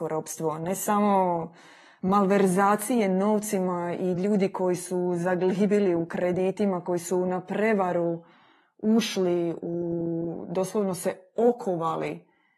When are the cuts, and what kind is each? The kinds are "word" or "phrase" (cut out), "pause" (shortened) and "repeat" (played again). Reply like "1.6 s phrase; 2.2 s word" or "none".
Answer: none